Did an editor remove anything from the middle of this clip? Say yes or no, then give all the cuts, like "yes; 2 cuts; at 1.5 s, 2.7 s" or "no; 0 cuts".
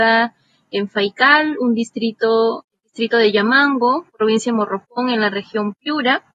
no; 0 cuts